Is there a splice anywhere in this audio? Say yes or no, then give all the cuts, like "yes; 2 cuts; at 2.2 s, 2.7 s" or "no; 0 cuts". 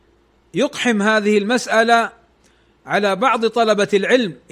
no; 0 cuts